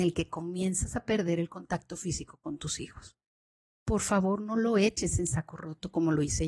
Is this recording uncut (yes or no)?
yes